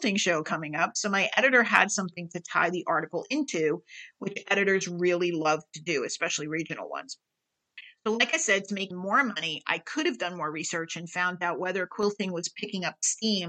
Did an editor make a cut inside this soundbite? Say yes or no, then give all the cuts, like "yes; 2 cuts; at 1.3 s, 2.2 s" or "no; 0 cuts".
yes; 1 cut; at 8.9 s